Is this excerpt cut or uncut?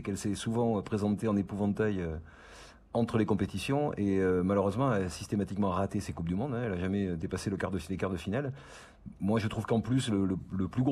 uncut